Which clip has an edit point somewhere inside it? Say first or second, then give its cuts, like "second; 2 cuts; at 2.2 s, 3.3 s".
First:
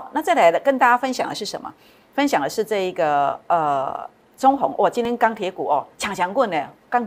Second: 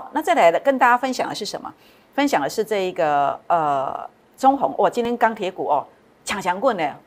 first; 1 cut; at 5.9 s